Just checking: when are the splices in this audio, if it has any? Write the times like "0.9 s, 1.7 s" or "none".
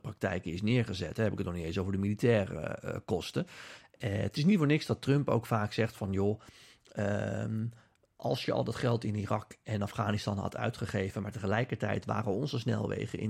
none